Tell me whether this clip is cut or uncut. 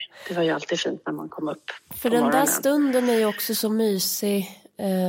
uncut